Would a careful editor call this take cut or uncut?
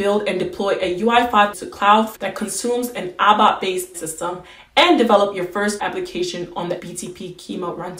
cut